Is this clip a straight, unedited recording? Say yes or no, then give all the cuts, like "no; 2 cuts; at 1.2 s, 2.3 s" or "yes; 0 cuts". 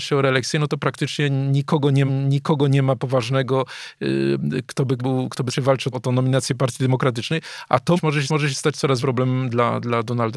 no; 7 cuts; at 2.1 s, 5.0 s, 5.5 s, 5.9 s, 8.0 s, 8.3 s, 9.0 s